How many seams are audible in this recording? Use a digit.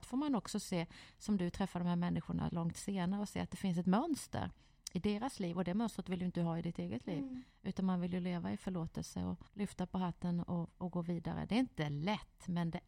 1